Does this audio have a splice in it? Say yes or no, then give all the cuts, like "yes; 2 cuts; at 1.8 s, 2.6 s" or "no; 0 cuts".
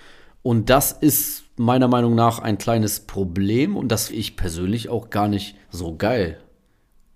yes; 2 cuts; at 4.1 s, 5.6 s